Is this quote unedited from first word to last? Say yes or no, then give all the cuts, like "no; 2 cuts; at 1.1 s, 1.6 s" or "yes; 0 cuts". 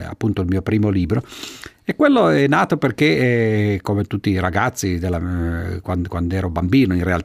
yes; 0 cuts